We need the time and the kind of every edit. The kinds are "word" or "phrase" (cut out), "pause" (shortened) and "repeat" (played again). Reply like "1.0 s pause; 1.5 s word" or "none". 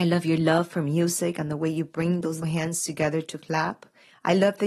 2.4 s word